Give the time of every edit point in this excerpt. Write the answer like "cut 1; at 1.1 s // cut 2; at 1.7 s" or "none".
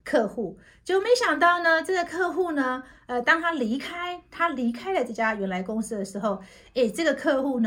none

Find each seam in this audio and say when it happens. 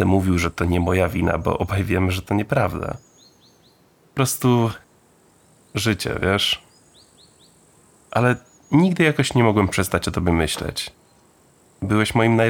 none

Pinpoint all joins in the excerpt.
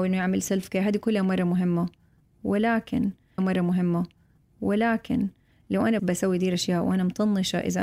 cut 1; at 3.4 s // cut 2; at 6.0 s

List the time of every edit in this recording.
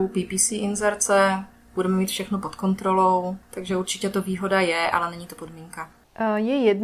none

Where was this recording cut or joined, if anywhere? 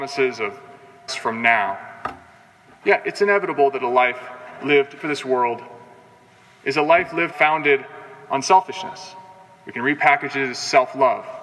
cut 1; at 1.1 s // cut 2; at 5.0 s // cut 3; at 7.3 s

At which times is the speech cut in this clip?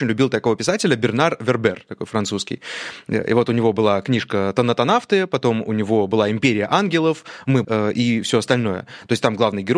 cut 1; at 7.6 s

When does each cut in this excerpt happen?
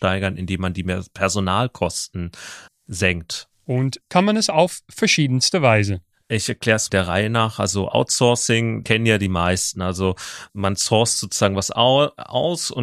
cut 1; at 2.7 s // cut 2; at 4.0 s // cut 3; at 6.9 s // cut 4; at 8.8 s // cut 5; at 10.5 s

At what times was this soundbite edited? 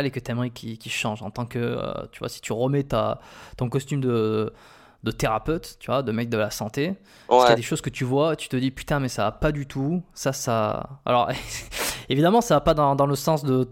none

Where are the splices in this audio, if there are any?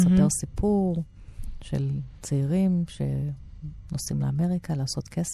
none

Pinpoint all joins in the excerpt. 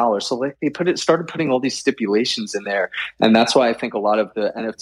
none

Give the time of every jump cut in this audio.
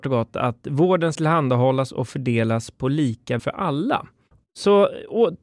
cut 1; at 1.1 s // cut 2; at 3.4 s // cut 3; at 4.3 s

